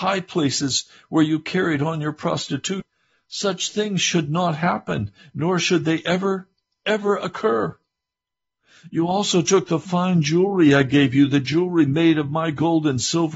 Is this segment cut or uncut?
uncut